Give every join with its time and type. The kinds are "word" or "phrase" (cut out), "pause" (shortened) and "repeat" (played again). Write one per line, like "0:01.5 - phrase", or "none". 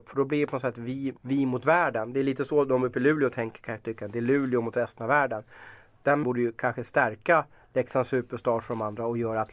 0:01.2 - pause
0:06.2 - word
0:07.6 - pause